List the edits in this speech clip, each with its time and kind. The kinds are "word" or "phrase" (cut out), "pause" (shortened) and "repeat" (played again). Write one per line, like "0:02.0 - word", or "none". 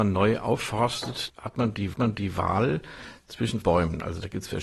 0:01.3 - word
0:01.9 - repeat
0:03.6 - word

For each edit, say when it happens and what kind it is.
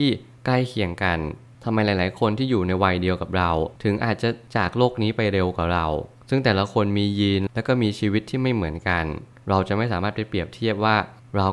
0:03.8 - pause

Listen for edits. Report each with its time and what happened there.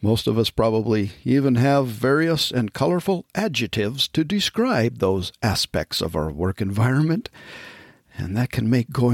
none

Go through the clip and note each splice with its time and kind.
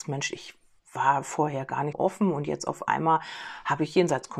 0:01.9 - word

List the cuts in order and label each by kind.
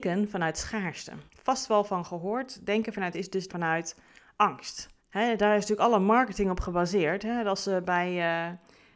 0:01.3 - pause
0:03.1 - word
0:03.5 - word
0:05.0 - pause

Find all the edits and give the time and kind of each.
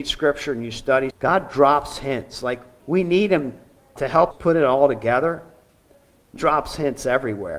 0:01.1 - word
0:02.8 - word
0:04.0 - word
0:04.3 - word
0:06.4 - word

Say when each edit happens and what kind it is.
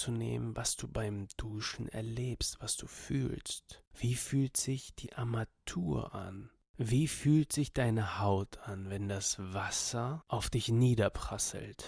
none

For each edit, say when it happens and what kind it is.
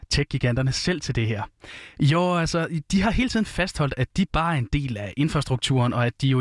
none

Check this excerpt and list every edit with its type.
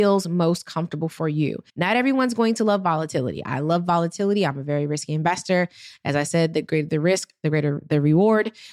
0:01.7 - pause

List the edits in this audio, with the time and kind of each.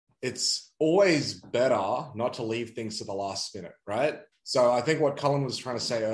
0:04.3 - pause

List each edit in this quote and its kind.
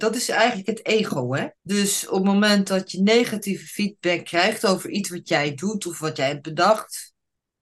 0:01.6 - pause

